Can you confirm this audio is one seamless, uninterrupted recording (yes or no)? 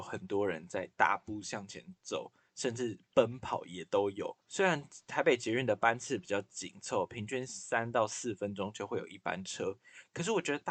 no